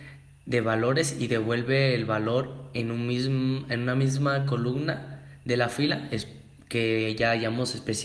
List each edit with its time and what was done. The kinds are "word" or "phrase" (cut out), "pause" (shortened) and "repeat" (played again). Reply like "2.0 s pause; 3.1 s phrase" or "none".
none